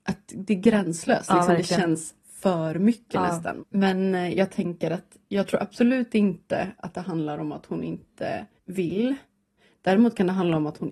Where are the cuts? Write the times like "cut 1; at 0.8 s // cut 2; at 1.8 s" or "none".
cut 1; at 5.2 s // cut 2; at 8.6 s